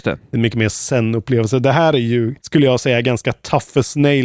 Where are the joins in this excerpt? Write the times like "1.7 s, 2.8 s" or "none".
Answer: 2.4 s